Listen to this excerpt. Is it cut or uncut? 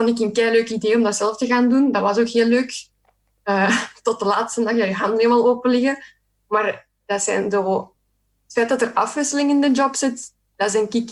uncut